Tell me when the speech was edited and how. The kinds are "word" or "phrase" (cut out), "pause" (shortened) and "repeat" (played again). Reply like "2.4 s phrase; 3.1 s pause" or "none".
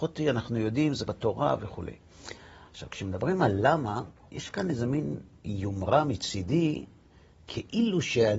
1.1 s word